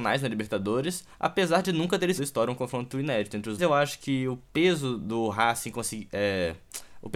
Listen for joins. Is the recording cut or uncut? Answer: cut